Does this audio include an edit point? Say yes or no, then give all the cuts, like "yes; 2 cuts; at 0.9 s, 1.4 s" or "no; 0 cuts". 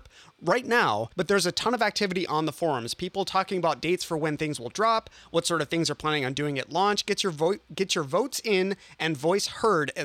yes; 1 cut; at 1.1 s